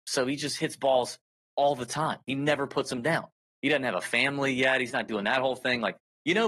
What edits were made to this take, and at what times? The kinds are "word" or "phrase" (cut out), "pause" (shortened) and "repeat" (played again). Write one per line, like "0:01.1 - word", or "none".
none